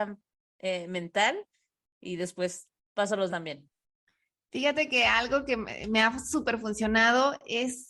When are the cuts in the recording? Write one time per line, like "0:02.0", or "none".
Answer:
0:03.3